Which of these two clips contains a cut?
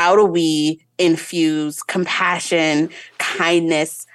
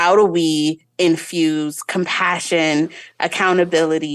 second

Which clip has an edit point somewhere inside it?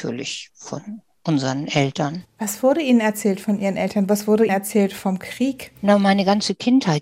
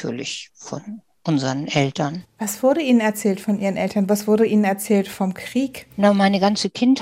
first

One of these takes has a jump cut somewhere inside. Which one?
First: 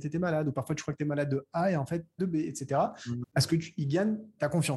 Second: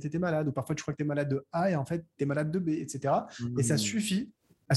first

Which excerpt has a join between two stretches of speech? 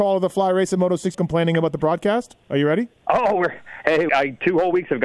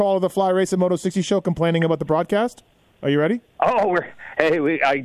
first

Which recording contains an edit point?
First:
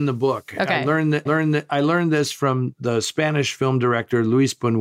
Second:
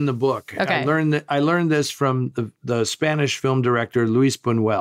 first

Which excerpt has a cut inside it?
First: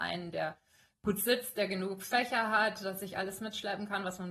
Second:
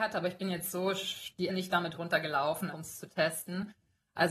second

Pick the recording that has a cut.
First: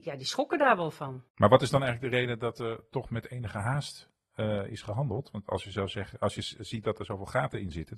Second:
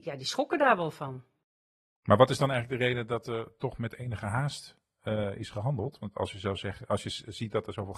first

